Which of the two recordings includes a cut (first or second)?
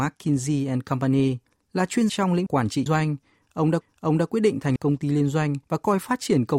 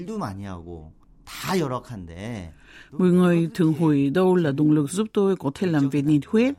first